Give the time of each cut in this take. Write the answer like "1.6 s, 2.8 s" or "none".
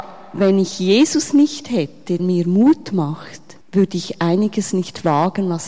2.2 s, 3.6 s